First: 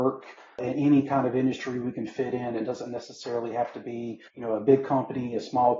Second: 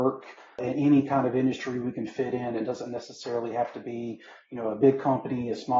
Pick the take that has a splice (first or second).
first